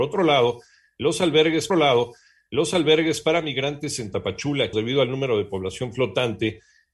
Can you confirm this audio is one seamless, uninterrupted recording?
no; 2 cuts; at 1.7 s, 4.7 s

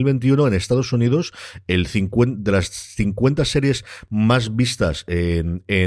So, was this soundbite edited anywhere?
no; 0 cuts

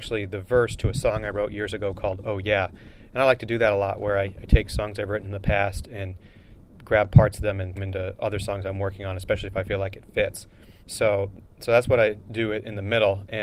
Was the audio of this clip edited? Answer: yes; 2 cuts; at 7.7 s, 10.8 s

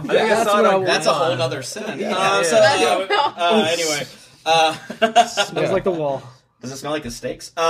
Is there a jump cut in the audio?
no; 0 cuts

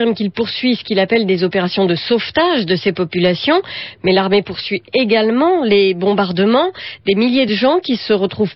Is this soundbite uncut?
yes; 0 cuts

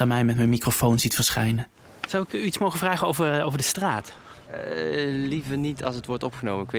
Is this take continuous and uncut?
yes; 0 cuts

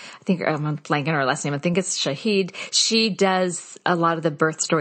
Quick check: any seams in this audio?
no; 0 cuts

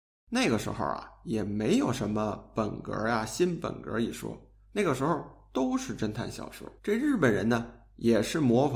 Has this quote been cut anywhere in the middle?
yes; 1 cut; at 6.8 s

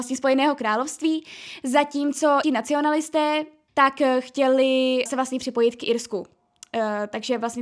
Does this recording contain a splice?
yes; 3 cuts; at 2.4 s, 3.7 s, 5.1 s

